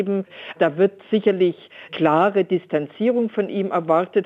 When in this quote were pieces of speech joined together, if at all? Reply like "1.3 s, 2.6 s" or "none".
1.9 s